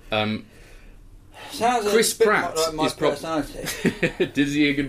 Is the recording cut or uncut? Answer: uncut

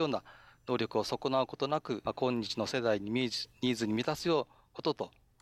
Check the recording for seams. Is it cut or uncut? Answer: cut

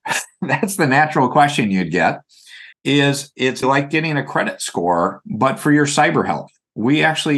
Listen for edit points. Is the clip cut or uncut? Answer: cut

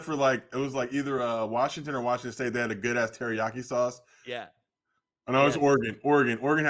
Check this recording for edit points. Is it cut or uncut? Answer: uncut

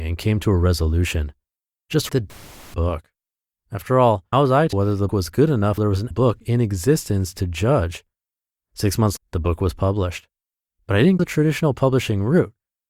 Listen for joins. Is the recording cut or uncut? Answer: cut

